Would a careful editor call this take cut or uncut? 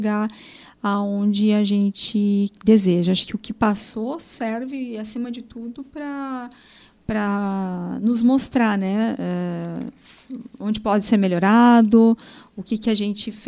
uncut